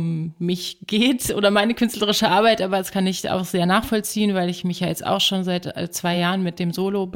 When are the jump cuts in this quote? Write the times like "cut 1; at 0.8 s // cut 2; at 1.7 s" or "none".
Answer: none